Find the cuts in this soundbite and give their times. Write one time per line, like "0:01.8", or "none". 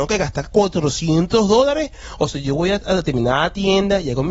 none